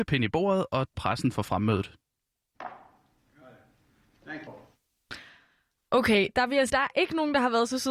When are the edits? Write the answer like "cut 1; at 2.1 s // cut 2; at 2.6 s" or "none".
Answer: cut 1; at 0.9 s // cut 2; at 4.5 s // cut 3; at 6.7 s

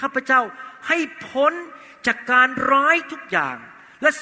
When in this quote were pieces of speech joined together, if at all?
none

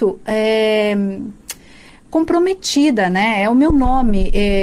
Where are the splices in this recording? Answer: none

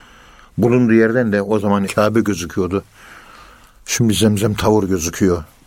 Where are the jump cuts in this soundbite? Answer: cut 1; at 1.9 s

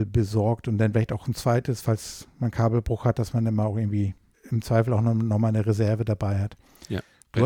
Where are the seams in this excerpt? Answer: cut 1; at 4.3 s

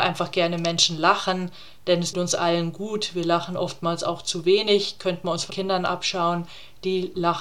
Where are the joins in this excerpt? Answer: cut 1; at 2.1 s // cut 2; at 5.5 s

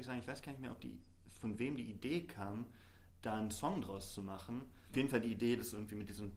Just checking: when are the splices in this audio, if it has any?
cut 1; at 3.1 s // cut 2; at 4.9 s

